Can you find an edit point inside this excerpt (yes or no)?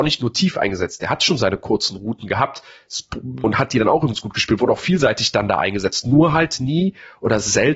yes